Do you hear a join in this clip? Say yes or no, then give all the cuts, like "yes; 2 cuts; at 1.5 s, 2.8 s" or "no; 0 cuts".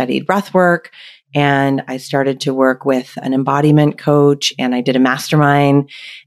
no; 0 cuts